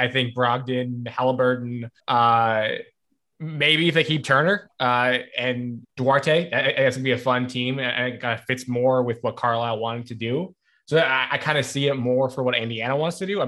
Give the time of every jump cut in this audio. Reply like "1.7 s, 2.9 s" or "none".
2.0 s, 5.8 s